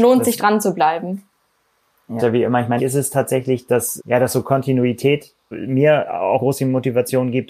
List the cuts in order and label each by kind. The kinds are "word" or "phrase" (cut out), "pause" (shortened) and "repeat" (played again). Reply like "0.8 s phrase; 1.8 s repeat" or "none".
2.2 s word; 2.8 s word; 4.0 s word; 5.5 s word; 6.4 s word

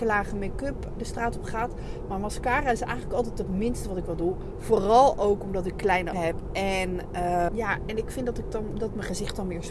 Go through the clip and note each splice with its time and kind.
1.0 s word; 6.1 s word; 7.5 s word

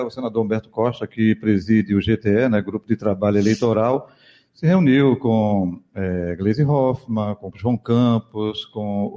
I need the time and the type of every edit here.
7.5 s word

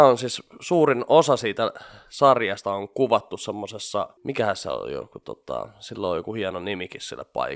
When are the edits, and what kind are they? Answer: 4.2 s pause

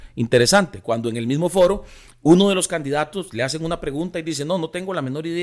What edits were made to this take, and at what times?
none

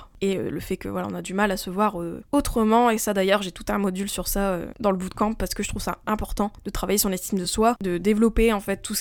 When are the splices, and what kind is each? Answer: none

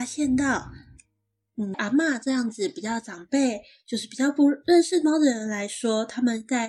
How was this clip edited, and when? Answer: 1.7 s word

